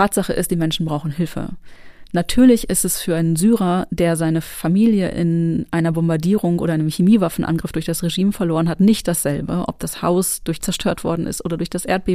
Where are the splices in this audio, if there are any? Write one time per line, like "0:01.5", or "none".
0:10.6